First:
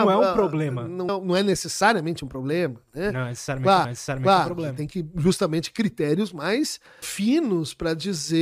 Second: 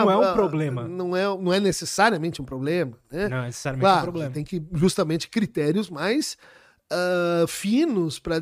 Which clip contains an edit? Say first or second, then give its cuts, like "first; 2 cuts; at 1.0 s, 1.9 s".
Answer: first; 3 cuts; at 1.1 s, 3.8 s, 7.0 s